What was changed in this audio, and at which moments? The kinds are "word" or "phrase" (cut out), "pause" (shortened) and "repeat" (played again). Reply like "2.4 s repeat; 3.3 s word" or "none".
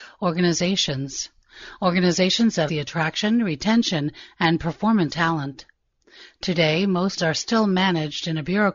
2.7 s word; 5.1 s word; 7.2 s word